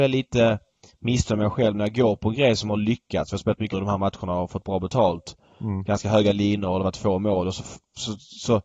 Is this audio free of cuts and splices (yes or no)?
no